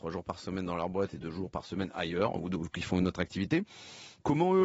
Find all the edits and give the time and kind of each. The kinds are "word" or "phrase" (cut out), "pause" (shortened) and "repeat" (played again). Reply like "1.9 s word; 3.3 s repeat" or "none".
none